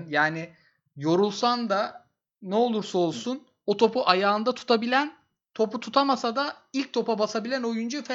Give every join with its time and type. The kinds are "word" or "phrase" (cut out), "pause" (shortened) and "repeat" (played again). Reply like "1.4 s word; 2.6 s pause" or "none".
none